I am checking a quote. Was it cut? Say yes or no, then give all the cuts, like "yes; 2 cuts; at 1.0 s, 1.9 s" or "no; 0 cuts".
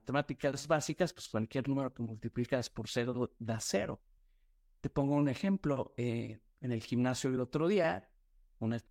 no; 0 cuts